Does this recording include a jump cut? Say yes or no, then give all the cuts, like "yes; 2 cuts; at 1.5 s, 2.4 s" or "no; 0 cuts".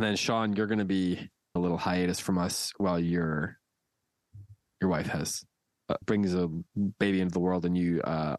yes; 2 cuts; at 1.6 s, 6.0 s